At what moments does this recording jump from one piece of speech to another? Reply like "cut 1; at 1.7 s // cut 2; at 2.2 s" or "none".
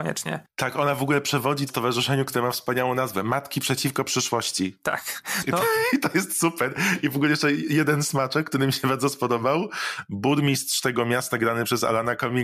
cut 1; at 1.7 s